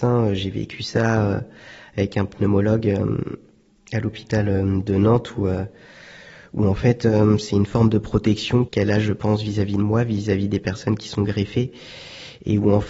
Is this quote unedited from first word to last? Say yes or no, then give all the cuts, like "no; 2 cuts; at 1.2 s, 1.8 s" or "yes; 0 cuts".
yes; 0 cuts